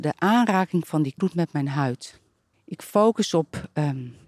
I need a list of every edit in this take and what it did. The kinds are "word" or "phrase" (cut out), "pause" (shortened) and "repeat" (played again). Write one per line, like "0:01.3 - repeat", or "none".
0:01.2 - word
0:02.5 - pause